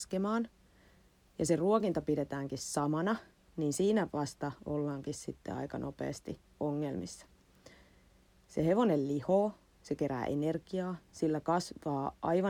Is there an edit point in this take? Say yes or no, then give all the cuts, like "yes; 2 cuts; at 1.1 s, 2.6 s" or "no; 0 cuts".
no; 0 cuts